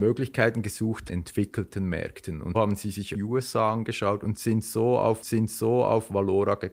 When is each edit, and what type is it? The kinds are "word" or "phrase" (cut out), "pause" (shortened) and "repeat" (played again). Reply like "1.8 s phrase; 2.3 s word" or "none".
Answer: 1.1 s phrase; 2.5 s word; 3.1 s phrase; 5.2 s repeat